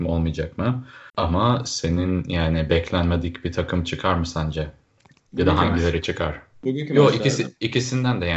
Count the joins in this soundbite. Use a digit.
1